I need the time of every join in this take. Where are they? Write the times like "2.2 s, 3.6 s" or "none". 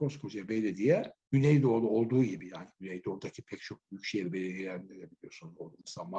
1.2 s